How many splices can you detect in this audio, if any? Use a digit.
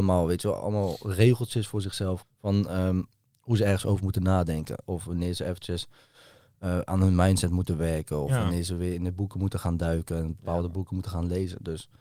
1